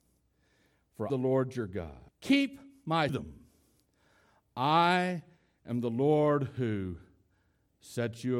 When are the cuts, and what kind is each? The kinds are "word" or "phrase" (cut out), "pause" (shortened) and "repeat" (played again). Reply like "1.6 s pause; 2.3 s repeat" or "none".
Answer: 1.1 s phrase; 2.1 s pause; 3.1 s phrase